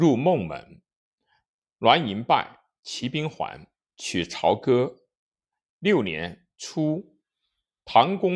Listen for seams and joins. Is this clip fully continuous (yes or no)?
yes